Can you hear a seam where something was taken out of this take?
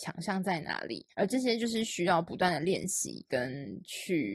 yes; 1 cut; at 1.1 s

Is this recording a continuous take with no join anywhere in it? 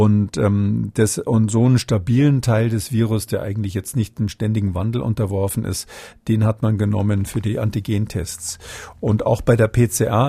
yes; 0 cuts

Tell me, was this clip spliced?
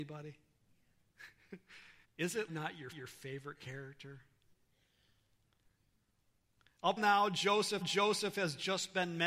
yes; 5 cuts; at 2.0 s, 2.5 s, 2.9 s, 7.0 s, 7.8 s

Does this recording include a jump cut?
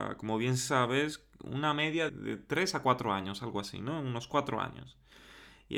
yes; 1 cut; at 2.1 s

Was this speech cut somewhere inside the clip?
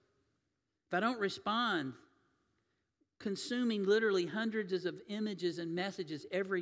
no; 0 cuts

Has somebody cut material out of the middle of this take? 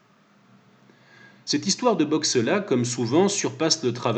no; 0 cuts

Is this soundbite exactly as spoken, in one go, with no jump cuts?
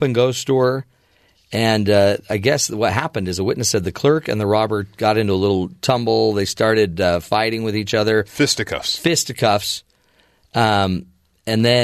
yes; 0 cuts

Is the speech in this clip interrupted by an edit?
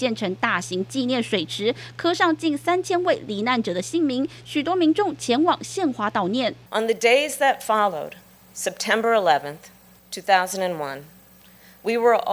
no; 0 cuts

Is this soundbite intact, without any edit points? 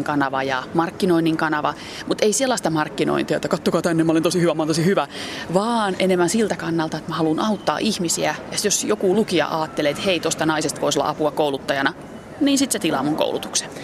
yes; 0 cuts

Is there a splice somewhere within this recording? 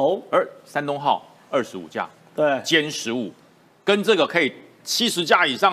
no; 0 cuts

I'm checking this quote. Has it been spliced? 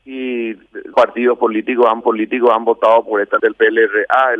yes; 3 cuts; at 0.9 s, 2.0 s, 3.4 s

